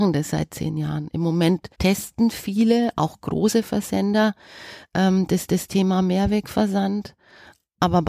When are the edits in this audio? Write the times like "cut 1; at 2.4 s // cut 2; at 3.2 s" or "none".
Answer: cut 1; at 1.7 s // cut 2; at 5.5 s